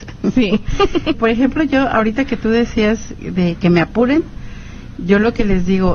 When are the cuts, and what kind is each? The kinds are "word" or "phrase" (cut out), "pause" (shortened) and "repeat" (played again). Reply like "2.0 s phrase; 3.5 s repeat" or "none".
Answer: 1.1 s word

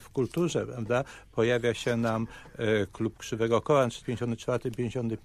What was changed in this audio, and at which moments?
4.0 s phrase

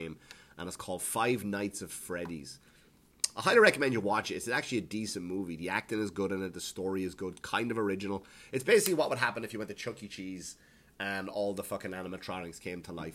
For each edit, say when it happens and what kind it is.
none

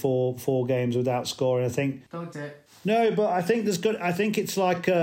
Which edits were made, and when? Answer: 2.3 s word

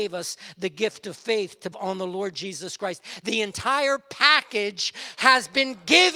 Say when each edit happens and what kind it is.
1.7 s word

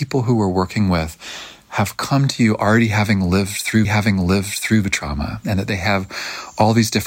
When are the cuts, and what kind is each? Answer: 3.8 s repeat

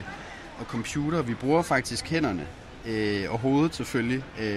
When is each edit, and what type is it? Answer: none

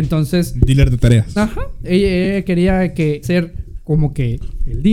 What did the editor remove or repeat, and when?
3.2 s word

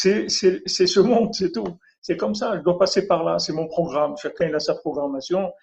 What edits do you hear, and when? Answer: none

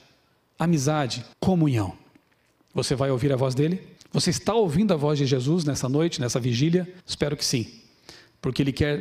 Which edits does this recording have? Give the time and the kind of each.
1.3 s pause; 4.0 s pause; 7.0 s pause

